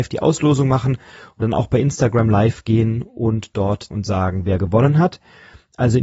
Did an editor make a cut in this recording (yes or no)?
yes